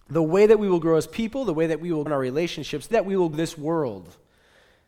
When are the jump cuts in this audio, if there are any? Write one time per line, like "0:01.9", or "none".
0:02.1
0:02.9
0:03.3